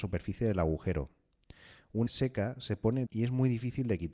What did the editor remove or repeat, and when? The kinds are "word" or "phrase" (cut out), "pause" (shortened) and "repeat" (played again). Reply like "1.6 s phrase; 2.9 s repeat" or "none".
2.1 s word; 3.1 s word